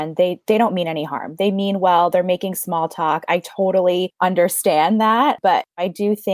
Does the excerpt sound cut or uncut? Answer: uncut